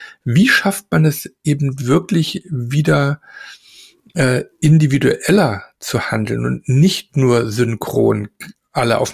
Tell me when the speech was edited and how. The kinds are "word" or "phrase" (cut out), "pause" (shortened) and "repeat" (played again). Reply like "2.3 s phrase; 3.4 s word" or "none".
none